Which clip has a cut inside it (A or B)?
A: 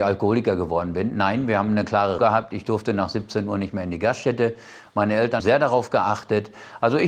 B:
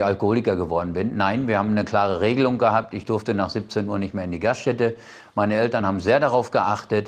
A